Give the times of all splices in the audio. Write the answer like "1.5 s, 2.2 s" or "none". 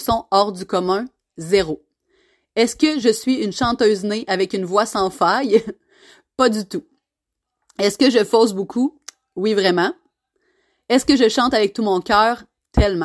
none